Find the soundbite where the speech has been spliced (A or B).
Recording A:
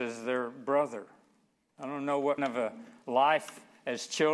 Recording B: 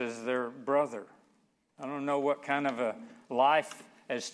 A